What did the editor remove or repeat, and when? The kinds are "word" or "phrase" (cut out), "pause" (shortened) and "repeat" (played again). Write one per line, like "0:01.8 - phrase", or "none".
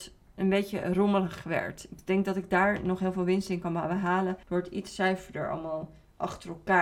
0:04.4 - pause